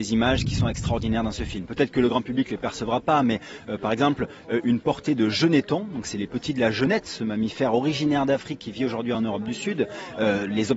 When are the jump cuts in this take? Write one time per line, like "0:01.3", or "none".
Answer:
none